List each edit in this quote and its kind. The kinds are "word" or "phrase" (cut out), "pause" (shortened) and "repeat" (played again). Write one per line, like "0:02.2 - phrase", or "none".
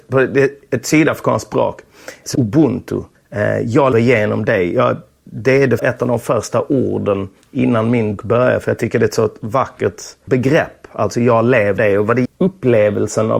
0:02.3 - word
0:03.9 - word
0:05.8 - word
0:08.2 - word
0:11.8 - word
0:12.2 - word